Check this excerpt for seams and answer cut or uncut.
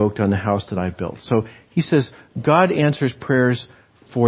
uncut